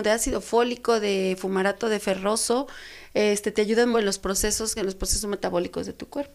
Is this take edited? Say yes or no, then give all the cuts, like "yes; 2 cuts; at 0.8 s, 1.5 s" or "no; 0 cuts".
yes; 2 cuts; at 3.9 s, 4.8 s